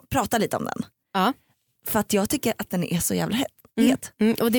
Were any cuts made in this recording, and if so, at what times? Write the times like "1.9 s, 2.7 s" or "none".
none